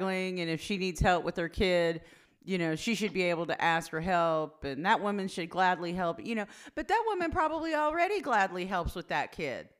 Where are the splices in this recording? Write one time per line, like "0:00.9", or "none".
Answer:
none

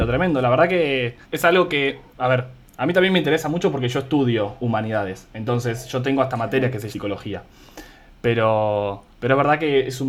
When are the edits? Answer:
0:01.2
0:02.1
0:06.9
0:09.1

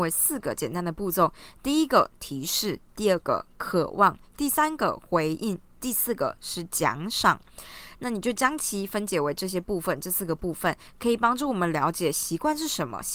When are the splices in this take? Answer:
none

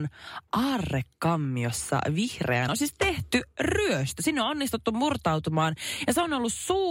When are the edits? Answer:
0:02.7

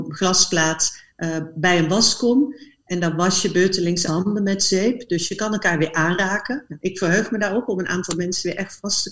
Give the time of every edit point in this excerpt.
0:04.1

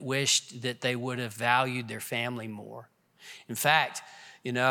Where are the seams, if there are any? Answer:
none

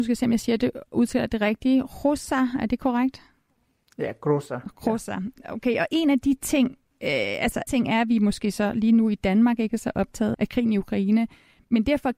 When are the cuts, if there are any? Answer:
0:07.7
0:10.3

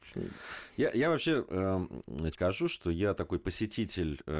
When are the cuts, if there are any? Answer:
0:02.3

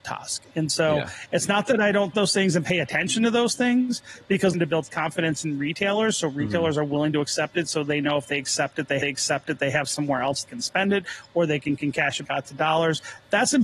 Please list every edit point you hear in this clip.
0:02.1
0:04.5
0:09.0
0:10.5
0:11.8
0:12.2

